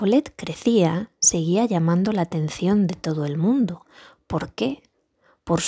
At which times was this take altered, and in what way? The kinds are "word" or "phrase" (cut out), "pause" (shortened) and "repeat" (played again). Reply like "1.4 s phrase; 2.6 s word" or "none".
none